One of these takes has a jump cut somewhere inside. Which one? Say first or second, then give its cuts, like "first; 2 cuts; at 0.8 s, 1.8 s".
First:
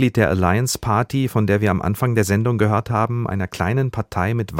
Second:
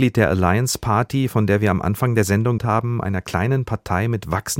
second; 1 cut; at 2.6 s